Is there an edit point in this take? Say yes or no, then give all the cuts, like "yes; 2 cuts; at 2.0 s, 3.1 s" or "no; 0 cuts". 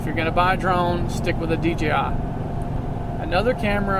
no; 0 cuts